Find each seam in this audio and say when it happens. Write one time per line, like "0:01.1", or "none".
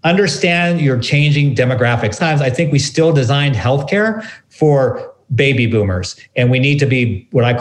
0:02.2